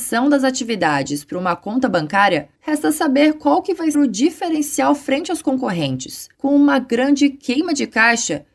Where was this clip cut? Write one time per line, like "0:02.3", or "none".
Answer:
0:02.5
0:03.9
0:06.3